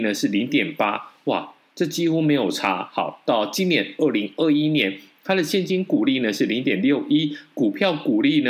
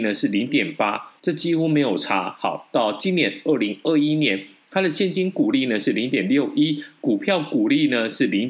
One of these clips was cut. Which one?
second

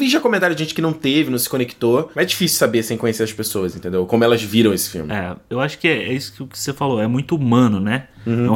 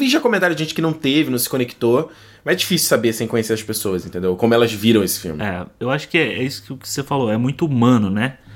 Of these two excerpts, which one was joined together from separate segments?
first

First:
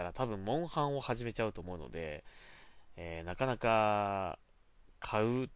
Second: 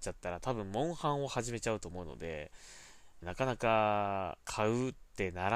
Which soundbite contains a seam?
second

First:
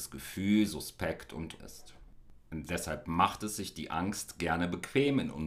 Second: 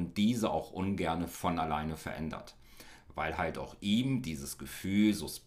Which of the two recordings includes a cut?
first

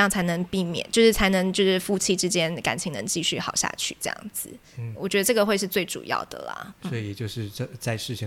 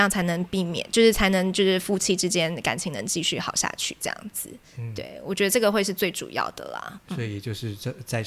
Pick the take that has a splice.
first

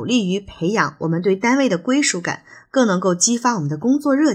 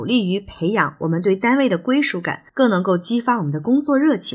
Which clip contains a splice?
second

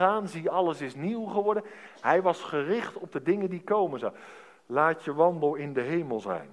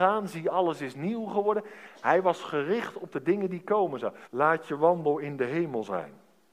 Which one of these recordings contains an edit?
second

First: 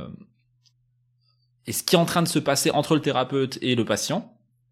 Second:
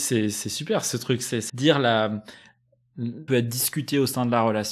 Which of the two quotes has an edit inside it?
second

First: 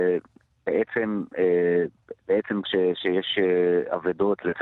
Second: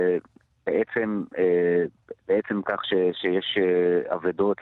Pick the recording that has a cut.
first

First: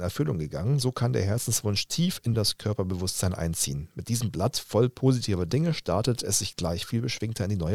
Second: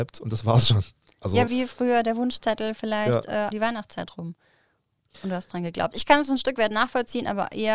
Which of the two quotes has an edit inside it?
second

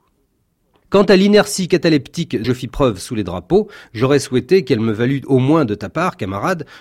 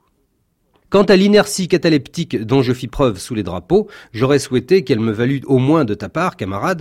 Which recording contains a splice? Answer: first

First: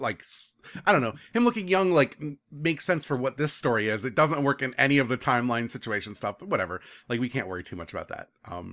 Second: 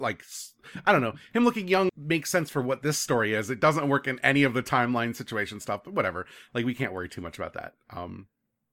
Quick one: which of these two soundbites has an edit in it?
second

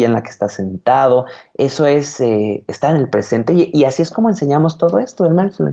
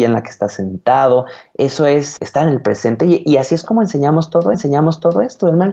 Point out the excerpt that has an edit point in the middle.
second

